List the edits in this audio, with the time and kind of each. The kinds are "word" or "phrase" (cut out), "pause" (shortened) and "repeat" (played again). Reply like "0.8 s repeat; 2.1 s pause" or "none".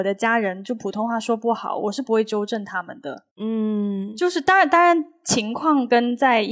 3.3 s pause